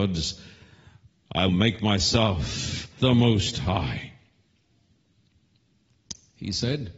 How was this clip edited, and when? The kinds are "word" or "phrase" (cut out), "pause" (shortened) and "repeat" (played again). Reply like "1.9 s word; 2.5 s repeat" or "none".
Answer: 1.5 s word; 3.0 s word